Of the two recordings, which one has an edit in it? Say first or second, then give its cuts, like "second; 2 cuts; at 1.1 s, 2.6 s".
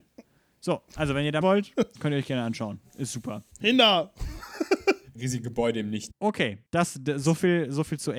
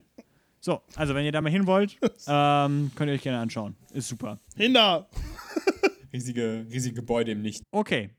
first; 4 cuts; at 1.4 s, 2.0 s, 5.2 s, 6.7 s